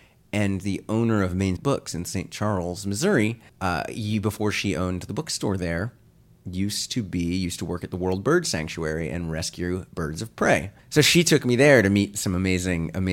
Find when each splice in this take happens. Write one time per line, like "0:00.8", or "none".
0:01.6
0:03.5
0:10.8